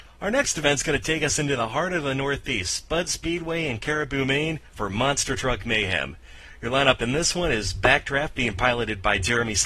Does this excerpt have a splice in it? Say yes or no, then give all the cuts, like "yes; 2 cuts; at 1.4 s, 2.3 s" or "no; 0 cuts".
no; 0 cuts